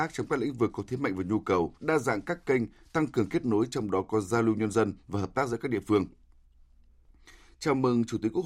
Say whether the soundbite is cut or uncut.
cut